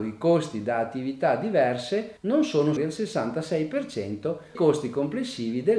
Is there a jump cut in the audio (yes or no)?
yes